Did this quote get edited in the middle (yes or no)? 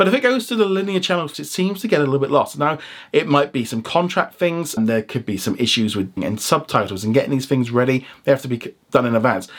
yes